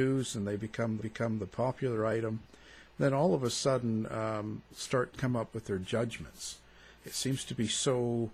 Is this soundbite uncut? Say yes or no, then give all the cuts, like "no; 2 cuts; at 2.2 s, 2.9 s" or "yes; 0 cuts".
no; 3 cuts; at 1.0 s, 4.7 s, 5.1 s